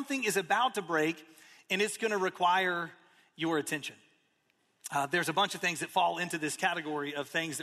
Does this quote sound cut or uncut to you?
uncut